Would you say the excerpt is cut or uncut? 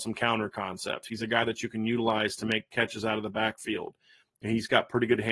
uncut